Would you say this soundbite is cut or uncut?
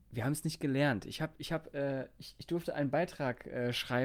uncut